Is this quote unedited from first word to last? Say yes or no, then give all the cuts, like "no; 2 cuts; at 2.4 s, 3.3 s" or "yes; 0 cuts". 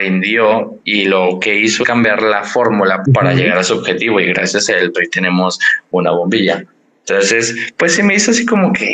no; 3 cuts; at 1.8 s, 3.0 s, 4.9 s